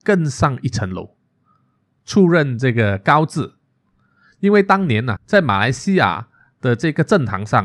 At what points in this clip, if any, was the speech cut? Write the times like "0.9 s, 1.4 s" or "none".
5.2 s